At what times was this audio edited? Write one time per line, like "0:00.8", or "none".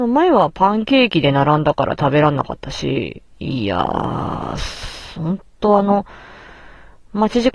0:03.3